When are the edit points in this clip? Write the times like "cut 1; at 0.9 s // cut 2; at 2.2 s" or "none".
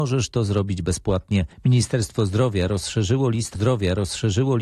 cut 1; at 1.5 s // cut 2; at 3.5 s